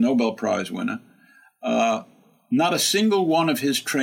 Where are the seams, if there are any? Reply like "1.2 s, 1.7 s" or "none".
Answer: none

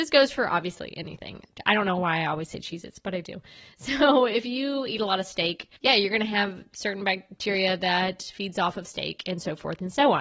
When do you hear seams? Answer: 5.8 s

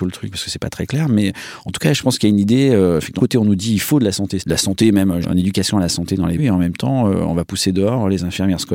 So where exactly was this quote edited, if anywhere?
3.2 s, 4.4 s, 5.2 s, 6.4 s

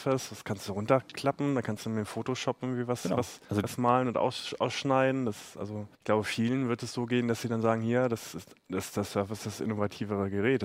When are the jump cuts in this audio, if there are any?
3.4 s, 5.9 s

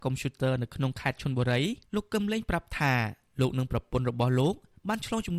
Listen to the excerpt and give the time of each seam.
1.8 s

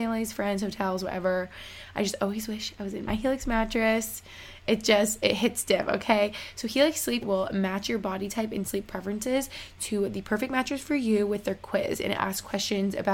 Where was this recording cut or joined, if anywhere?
3.1 s, 7.2 s

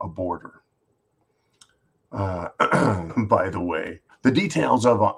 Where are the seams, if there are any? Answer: 3.1 s, 4.1 s

